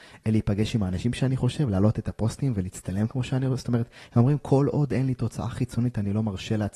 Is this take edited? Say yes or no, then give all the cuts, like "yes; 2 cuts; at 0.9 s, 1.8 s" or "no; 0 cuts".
no; 0 cuts